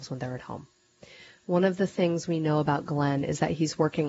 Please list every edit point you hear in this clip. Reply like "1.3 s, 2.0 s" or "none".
none